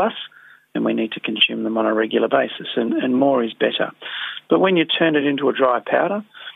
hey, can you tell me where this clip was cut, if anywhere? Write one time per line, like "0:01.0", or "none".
none